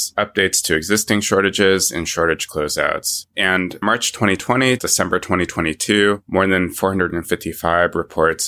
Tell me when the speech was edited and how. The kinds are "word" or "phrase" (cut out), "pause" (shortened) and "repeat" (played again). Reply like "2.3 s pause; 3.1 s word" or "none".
3.8 s word; 4.8 s word